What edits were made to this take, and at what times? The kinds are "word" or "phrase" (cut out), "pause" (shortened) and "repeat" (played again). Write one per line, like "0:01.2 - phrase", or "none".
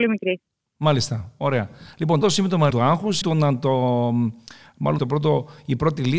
0:02.2 - word
0:02.7 - word
0:03.2 - word
0:05.0 - word

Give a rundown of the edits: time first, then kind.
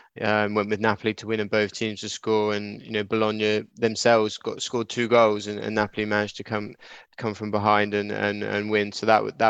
0:03.7 - pause

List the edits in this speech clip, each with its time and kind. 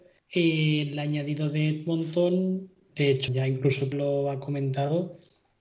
0:03.3 - word
0:03.9 - phrase

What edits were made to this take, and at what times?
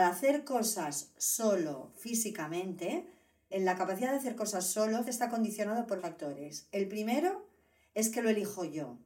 0:03.5 - word
0:05.0 - word
0:06.0 - word

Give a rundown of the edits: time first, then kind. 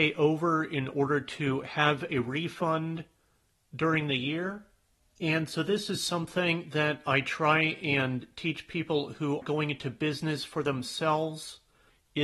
0:09.4 - word

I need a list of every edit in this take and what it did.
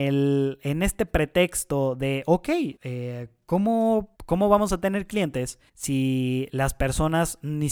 0:02.8 - pause
0:04.1 - pause
0:05.7 - pause

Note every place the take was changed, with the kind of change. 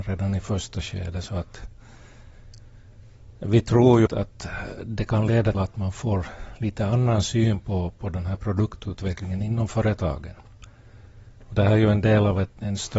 0:04.1 - word
0:05.5 - word

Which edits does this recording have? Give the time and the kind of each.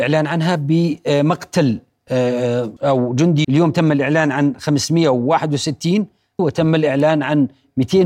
0:02.8 - word
0:03.4 - word
0:06.4 - word

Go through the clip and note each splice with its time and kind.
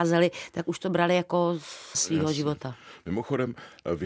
0:01.9 - word

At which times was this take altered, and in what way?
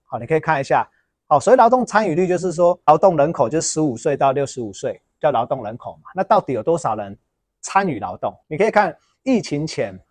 0:08.4 - pause

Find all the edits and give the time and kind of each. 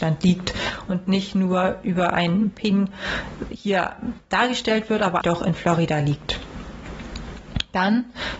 0:05.2 - word

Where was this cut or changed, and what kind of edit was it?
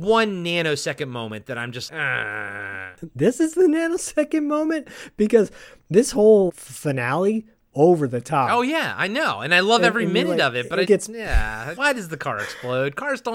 0:01.9 - word
0:06.5 - word
0:07.7 - phrase
0:10.8 - word
0:11.8 - word

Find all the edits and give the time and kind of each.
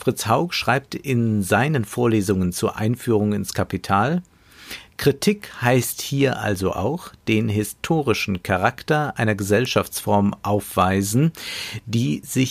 none

